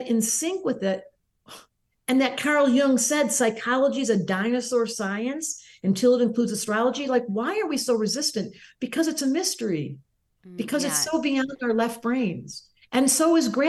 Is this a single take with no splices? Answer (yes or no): yes